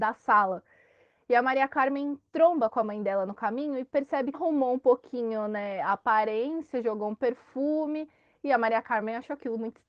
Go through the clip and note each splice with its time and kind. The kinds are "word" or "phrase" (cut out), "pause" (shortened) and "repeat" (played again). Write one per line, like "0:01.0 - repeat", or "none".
0:04.3 - phrase